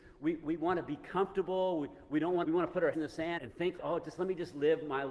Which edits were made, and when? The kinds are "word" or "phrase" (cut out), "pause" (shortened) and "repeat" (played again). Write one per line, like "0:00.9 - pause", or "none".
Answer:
0:02.4 - word
0:02.9 - word
0:03.4 - word
0:03.8 - word